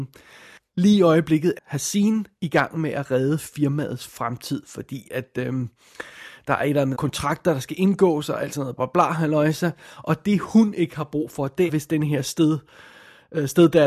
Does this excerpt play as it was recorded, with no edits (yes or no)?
no